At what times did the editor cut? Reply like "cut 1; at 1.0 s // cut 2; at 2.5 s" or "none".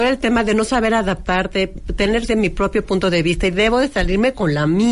cut 1; at 2.3 s